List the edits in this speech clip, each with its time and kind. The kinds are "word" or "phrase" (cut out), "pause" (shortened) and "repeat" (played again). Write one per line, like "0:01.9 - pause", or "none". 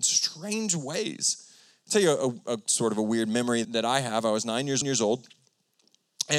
0:01.6 - pause
0:03.6 - word
0:04.8 - repeat